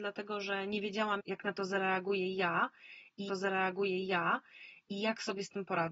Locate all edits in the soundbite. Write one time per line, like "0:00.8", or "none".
0:01.2
0:03.3